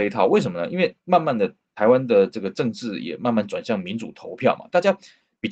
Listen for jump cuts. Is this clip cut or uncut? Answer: cut